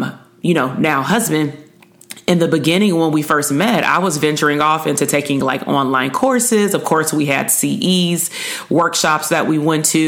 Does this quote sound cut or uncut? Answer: uncut